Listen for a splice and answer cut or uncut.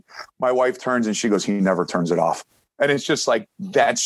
cut